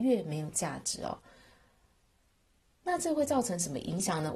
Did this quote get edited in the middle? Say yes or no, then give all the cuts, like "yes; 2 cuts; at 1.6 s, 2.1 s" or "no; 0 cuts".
no; 0 cuts